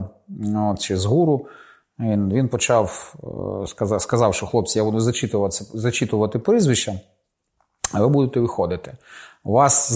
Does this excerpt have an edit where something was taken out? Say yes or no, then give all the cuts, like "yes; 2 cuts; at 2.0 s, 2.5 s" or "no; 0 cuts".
no; 0 cuts